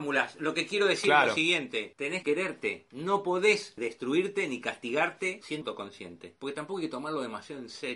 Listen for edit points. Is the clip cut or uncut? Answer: cut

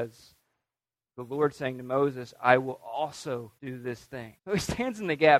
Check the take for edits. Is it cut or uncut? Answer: cut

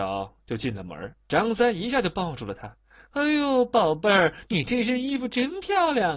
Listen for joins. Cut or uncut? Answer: cut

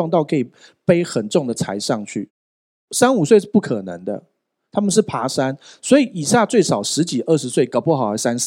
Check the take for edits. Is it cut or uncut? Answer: uncut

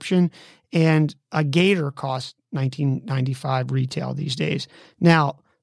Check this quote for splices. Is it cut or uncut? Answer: uncut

